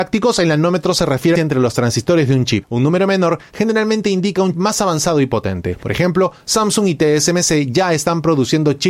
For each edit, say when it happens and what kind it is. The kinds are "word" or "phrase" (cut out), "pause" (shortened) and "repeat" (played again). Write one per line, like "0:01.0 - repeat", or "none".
0:01.4 - phrase
0:04.5 - word